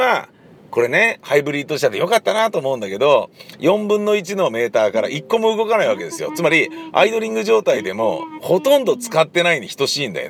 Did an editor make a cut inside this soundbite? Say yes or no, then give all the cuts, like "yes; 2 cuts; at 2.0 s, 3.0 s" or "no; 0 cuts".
no; 0 cuts